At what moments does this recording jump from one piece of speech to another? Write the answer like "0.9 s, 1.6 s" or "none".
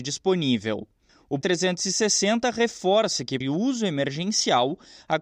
1.4 s, 3.4 s